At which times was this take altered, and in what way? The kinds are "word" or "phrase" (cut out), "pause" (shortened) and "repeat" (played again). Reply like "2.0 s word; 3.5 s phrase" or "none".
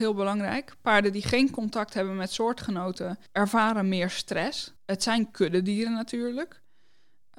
3.3 s pause; 4.8 s pause